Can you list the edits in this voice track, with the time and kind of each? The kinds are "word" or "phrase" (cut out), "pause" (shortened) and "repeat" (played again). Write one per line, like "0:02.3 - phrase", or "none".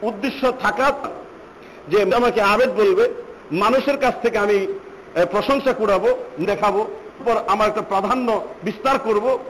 0:01.0 - word
0:02.1 - word
0:06.4 - word
0:07.2 - word